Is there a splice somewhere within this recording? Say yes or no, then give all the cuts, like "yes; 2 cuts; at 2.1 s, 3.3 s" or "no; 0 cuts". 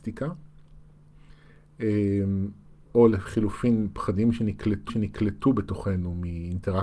yes; 2 cuts; at 2.9 s, 4.9 s